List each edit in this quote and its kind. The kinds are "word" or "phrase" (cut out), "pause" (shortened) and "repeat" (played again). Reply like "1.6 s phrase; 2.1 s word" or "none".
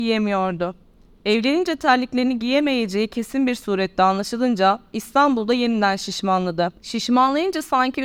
6.8 s pause

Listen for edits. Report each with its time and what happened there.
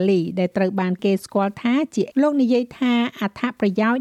2.1 s word

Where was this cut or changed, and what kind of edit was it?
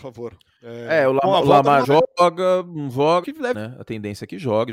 1.8 s word; 3.2 s word; 3.5 s word

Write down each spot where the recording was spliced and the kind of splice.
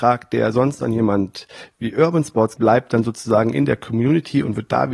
2.6 s word

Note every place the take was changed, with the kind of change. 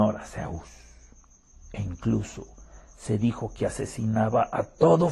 none

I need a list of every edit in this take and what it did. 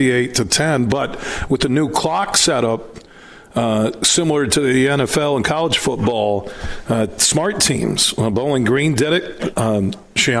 none

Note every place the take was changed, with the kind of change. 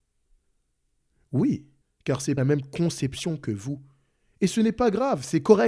1.8 s pause; 2.4 s phrase

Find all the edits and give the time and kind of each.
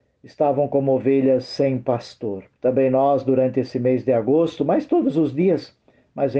2.5 s pause

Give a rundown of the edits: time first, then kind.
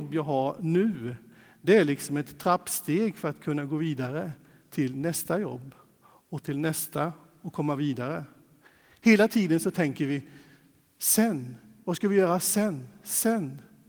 none

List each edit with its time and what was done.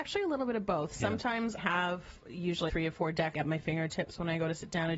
1.6 s word; 2.7 s word; 3.3 s word

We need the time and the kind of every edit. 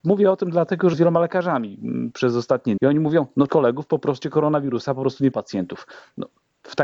0.9 s word; 2.8 s word; 3.5 s word; 4.2 s word; 5.3 s word

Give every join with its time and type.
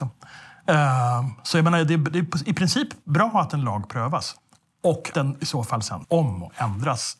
5.1 s word; 6.0 s word

